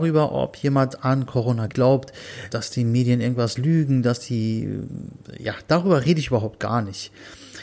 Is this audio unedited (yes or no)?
no